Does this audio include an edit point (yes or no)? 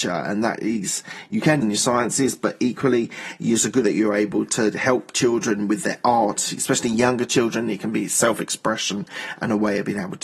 yes